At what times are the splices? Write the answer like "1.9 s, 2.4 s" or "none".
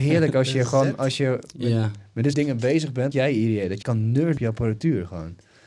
2.3 s, 3.1 s, 3.8 s, 4.4 s